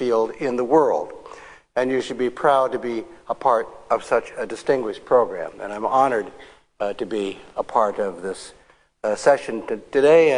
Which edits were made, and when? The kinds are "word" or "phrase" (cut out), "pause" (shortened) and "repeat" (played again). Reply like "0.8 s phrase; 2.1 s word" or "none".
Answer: none

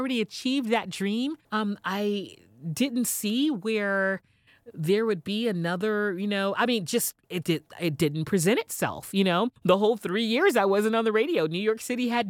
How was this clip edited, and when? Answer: 1.4 s pause; 7.4 s word; 9.6 s pause

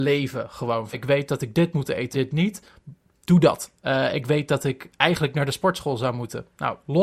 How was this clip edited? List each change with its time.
0.9 s word; 2.1 s word

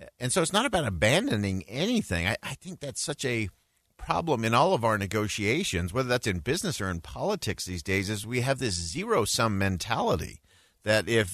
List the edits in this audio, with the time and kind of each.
none

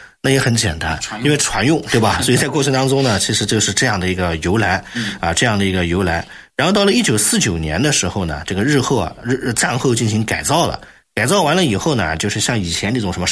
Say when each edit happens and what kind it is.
none

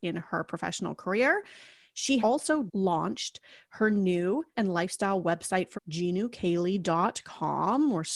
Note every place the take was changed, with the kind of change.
2.2 s word; 2.7 s word; 4.5 s word; 5.7 s word

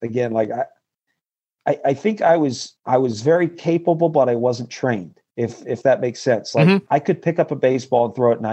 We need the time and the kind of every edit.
2.8 s pause; 5.3 s pause; 6.9 s pause

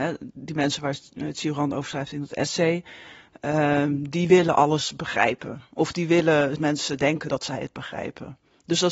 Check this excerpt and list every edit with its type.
6.6 s phrase

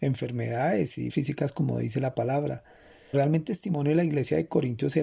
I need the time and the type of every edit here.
1.1 s word; 3.1 s word; 3.4 s word

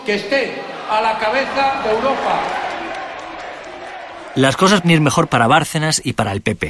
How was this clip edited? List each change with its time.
4.8 s word

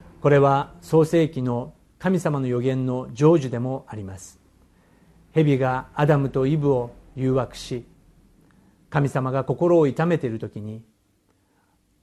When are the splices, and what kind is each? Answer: 1.9 s pause

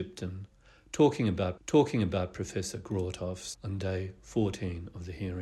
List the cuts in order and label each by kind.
1.6 s repeat; 3.5 s word

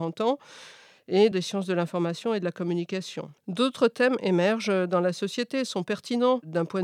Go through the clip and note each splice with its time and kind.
1.3 s phrase; 3.4 s pause

